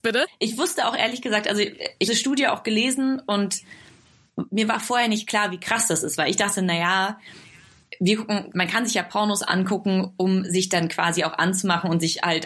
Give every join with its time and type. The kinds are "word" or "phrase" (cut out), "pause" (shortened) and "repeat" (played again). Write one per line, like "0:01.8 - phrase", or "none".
0:02.1 - phrase
0:08.5 - word